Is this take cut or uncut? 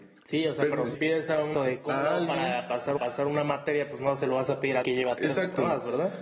cut